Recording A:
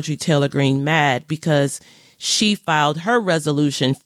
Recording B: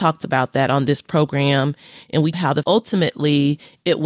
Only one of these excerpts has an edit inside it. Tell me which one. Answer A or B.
B